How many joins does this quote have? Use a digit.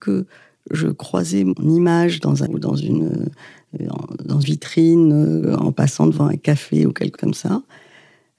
3